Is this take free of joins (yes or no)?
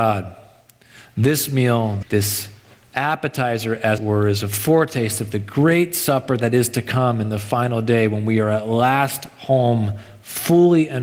no